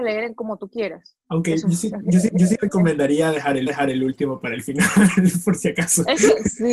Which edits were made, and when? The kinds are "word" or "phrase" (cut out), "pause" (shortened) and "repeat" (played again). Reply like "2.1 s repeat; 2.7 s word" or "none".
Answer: 2.3 s repeat; 3.7 s repeat